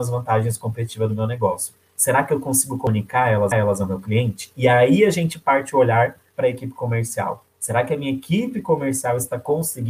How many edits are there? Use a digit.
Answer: 1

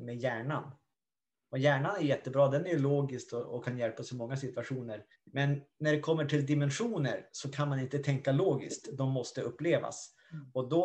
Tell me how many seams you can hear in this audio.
1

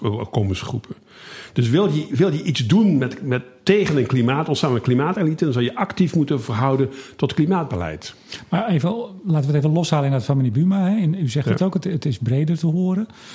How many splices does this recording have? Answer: 0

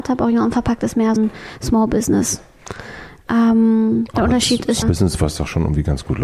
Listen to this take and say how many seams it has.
2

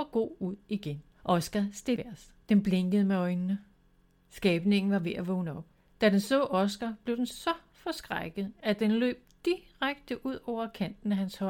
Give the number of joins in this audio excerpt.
4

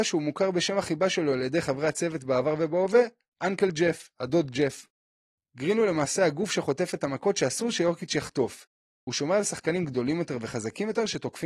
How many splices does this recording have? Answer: 0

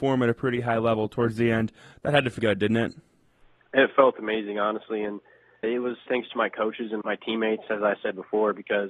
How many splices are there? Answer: 4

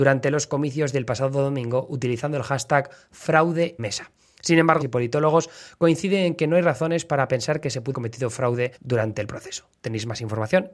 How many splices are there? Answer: 4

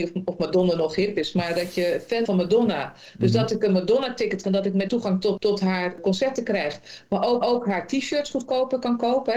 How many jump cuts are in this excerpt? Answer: 5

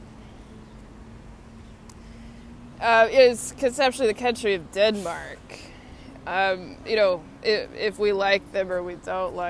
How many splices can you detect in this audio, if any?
0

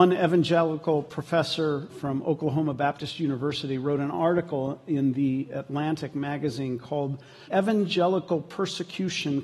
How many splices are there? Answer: 2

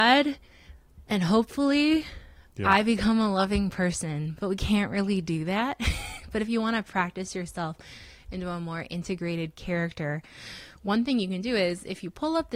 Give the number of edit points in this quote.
0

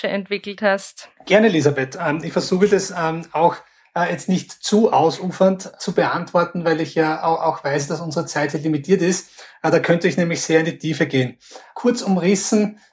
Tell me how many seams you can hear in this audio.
0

